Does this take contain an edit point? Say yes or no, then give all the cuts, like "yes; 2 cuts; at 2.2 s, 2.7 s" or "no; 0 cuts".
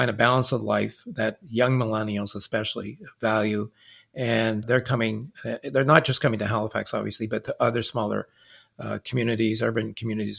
yes; 2 cuts; at 1.4 s, 4.6 s